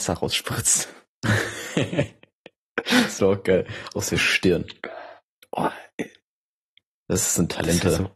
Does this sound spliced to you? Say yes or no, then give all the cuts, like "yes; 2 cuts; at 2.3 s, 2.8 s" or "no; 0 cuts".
no; 0 cuts